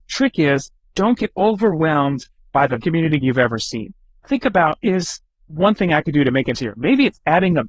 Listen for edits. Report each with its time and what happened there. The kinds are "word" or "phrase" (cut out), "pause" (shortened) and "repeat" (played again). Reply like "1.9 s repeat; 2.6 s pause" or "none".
2.8 s word; 3.2 s word; 4.8 s word; 6.5 s word